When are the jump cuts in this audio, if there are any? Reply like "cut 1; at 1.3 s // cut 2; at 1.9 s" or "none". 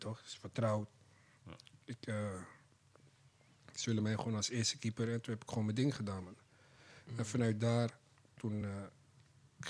none